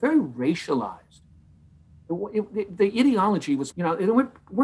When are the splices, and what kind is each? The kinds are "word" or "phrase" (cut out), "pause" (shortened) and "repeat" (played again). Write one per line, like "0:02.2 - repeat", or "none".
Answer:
0:03.7 - word

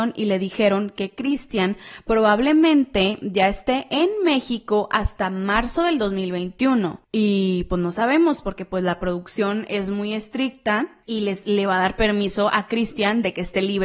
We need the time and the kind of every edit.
0:11.0 - pause

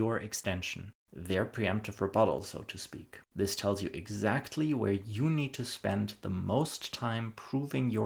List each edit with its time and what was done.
0:03.2 - pause

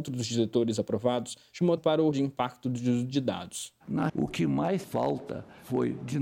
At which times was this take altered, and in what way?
0:01.8 - word
0:02.1 - word
0:04.1 - word
0:04.8 - word

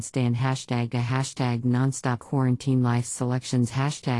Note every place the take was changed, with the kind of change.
0:00.9 - word
0:02.2 - word
0:03.0 - word

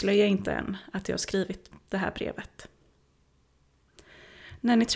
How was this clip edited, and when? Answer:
none

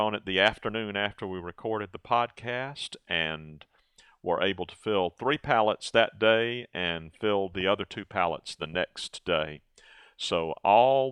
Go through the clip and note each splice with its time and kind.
none

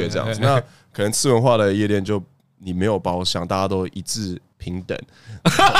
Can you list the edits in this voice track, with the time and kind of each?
none

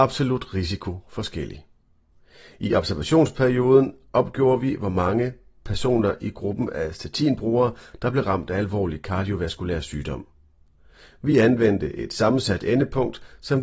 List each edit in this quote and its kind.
none

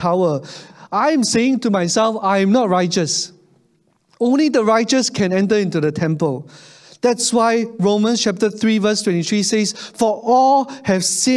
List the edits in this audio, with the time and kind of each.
none

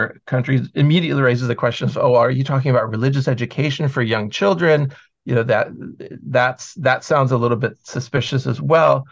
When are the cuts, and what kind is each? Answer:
none

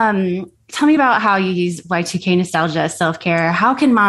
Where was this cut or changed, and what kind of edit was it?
none

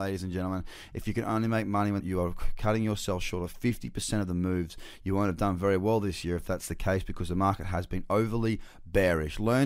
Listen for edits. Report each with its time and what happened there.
0:02.0 - phrase

